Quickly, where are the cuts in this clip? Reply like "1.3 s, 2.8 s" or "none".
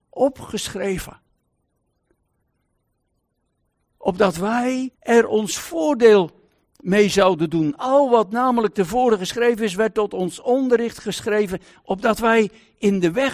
4.9 s